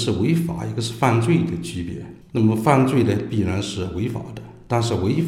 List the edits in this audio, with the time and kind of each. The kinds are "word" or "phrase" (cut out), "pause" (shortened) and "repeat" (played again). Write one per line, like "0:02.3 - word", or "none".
0:02.2 - pause